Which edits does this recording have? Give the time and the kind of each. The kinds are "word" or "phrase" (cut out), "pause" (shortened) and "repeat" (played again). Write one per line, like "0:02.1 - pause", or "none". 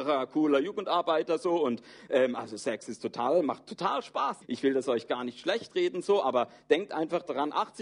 0:04.4 - word